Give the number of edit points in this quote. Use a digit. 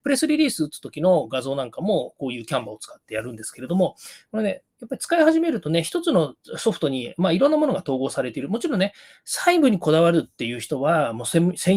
1